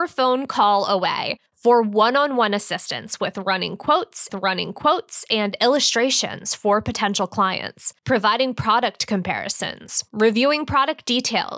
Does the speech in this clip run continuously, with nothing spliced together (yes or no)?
no